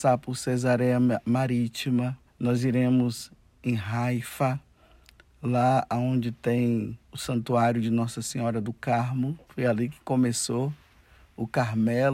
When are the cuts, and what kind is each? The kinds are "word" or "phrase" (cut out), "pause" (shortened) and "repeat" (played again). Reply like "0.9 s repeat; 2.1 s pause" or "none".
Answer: 2.3 s pause; 7.0 s pause; 9.4 s pause